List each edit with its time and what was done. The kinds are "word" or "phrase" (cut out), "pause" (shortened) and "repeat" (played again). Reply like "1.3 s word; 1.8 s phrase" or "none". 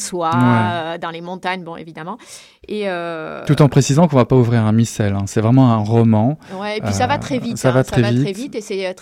none